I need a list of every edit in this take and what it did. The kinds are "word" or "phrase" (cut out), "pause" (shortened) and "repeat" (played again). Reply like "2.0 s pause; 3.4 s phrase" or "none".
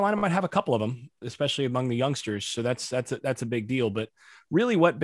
1.2 s word